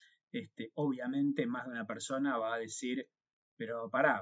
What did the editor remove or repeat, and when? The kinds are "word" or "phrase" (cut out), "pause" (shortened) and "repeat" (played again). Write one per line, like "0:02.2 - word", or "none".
none